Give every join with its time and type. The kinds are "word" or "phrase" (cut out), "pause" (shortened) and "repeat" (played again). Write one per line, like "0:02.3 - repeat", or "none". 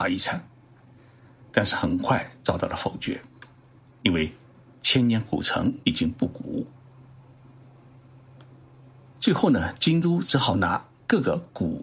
0:05.8 - pause